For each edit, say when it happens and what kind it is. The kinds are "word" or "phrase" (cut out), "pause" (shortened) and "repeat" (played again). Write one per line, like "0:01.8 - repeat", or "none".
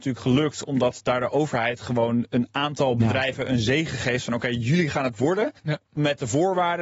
0:05.6 - pause